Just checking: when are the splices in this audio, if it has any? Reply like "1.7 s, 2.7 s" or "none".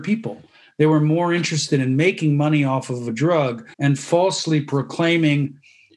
3.7 s